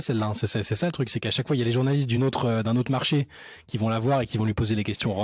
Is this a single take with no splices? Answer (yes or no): yes